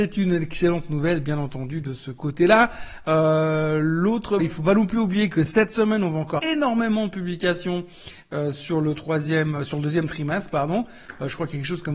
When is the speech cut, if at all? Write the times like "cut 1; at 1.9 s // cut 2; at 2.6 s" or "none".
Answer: cut 1; at 4.4 s // cut 2; at 6.4 s